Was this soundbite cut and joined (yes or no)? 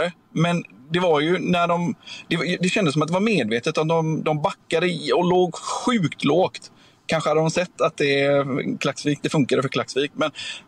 no